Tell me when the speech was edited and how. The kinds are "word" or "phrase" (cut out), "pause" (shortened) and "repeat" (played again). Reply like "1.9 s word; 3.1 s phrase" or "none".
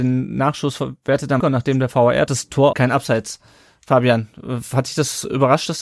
1.4 s word; 2.3 s phrase; 2.7 s phrase